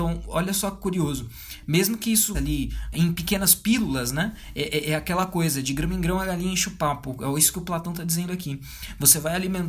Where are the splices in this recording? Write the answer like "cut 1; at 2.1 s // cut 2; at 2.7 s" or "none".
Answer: cut 1; at 2.3 s // cut 2; at 2.9 s

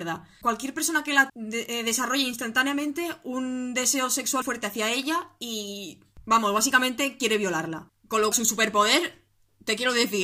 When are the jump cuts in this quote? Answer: cut 1; at 1.3 s // cut 2; at 4.4 s // cut 3; at 8.3 s

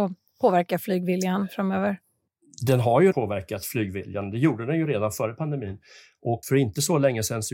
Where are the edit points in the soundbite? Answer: cut 1; at 3.1 s // cut 2; at 6.4 s

